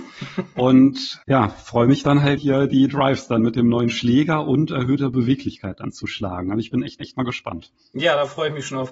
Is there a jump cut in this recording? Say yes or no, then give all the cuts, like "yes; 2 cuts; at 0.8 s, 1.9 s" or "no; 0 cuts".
yes; 3 cuts; at 1.2 s, 2.4 s, 7.0 s